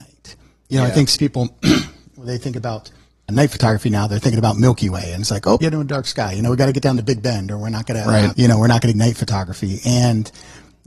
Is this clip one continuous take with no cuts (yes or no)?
no